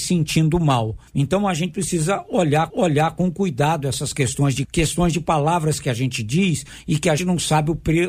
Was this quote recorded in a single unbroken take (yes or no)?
no